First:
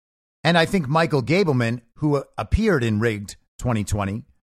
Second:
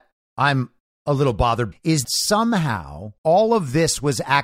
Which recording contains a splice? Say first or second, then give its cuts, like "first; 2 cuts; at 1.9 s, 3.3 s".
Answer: second; 3 cuts; at 1.7 s, 2.0 s, 3.2 s